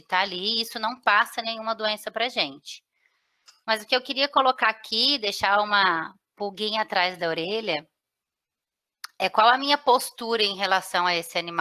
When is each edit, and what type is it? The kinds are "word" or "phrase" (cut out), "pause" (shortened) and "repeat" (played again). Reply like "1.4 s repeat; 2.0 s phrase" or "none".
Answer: none